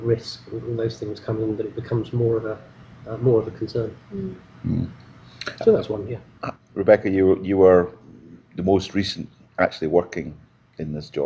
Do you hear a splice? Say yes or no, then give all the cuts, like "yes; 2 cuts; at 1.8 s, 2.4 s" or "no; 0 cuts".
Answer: no; 0 cuts